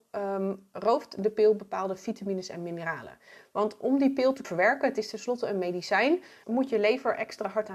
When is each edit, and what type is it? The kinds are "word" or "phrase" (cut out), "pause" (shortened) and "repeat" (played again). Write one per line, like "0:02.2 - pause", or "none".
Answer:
0:04.4 - word
0:06.4 - word